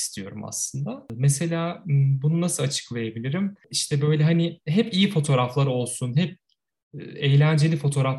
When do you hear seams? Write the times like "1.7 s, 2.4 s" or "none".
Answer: none